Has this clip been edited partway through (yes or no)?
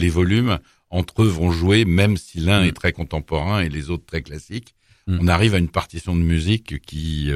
no